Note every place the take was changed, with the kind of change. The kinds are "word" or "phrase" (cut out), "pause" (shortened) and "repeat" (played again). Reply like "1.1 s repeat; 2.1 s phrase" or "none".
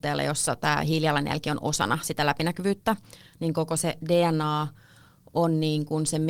none